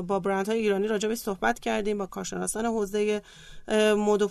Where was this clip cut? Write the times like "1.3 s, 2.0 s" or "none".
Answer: none